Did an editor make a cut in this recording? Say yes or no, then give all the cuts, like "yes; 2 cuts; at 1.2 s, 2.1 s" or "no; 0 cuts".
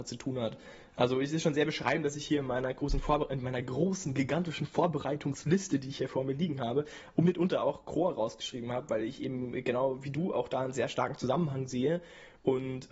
no; 0 cuts